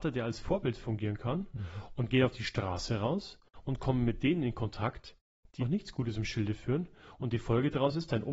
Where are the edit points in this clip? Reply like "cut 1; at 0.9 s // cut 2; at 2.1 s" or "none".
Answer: cut 1; at 5.6 s